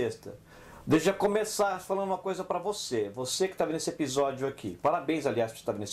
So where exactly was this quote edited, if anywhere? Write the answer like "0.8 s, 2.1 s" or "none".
none